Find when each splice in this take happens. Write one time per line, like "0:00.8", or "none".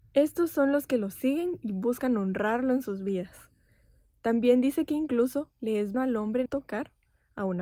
0:05.9
0:06.5